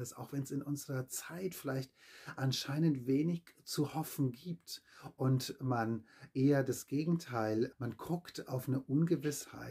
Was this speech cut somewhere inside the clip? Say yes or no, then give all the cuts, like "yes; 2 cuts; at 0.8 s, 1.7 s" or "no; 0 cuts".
yes; 1 cut; at 7.7 s